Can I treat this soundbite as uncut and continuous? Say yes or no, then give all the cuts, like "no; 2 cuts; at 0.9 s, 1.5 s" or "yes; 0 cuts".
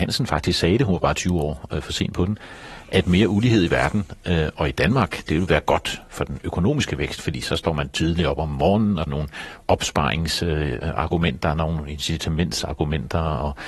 no; 1 cut; at 9.1 s